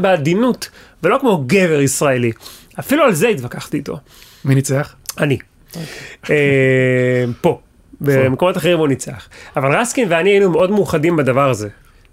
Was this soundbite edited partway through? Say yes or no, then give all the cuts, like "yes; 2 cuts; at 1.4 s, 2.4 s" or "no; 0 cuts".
no; 0 cuts